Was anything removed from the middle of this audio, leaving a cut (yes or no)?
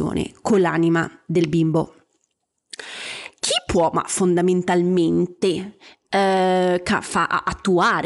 no